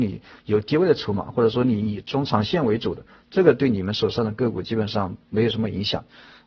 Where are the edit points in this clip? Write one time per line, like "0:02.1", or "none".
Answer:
none